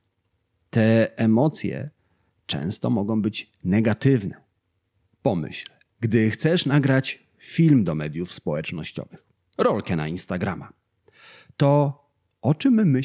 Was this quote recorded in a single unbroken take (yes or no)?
yes